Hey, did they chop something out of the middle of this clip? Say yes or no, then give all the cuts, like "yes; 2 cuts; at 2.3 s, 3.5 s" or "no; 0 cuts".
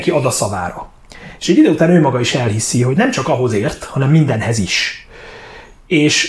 no; 0 cuts